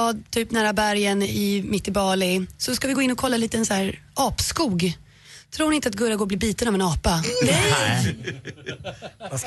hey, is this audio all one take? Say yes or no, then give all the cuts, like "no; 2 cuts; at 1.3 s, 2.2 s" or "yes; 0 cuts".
yes; 0 cuts